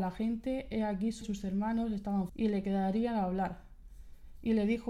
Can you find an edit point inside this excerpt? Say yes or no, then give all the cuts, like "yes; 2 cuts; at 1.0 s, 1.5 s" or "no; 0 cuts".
yes; 2 cuts; at 1.2 s, 2.3 s